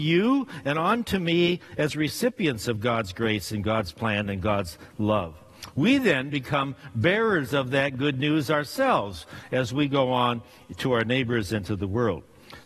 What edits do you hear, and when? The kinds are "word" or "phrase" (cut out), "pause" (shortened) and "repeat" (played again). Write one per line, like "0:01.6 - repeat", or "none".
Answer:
none